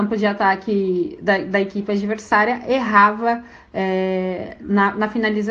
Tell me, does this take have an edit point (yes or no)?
no